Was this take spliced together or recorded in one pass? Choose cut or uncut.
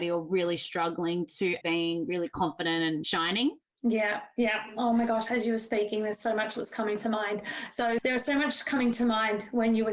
cut